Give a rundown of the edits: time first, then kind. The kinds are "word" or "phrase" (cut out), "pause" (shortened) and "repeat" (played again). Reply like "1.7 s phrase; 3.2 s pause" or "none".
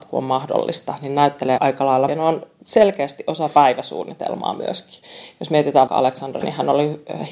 1.6 s word; 2.1 s phrase; 5.9 s word; 6.4 s word